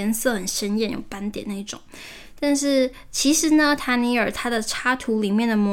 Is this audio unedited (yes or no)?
yes